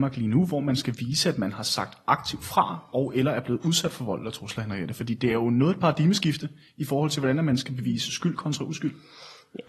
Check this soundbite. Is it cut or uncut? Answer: uncut